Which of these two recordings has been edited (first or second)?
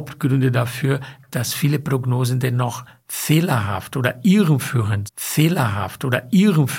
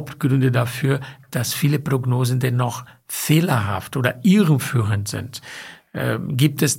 first